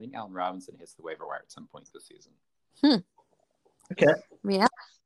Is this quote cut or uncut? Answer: uncut